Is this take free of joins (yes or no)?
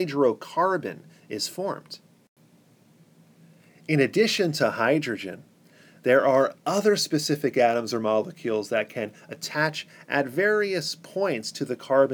yes